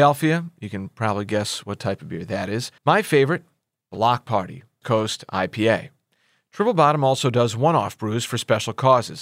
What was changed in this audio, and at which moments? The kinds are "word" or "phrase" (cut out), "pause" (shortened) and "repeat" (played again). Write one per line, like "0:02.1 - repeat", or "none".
0:02.8 - pause
0:04.8 - phrase